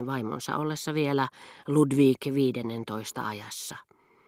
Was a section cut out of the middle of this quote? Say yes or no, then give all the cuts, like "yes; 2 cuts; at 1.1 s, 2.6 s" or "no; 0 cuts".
no; 0 cuts